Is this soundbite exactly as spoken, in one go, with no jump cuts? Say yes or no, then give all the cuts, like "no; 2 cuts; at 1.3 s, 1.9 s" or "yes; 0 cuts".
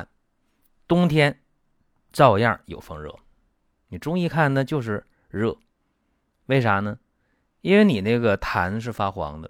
yes; 0 cuts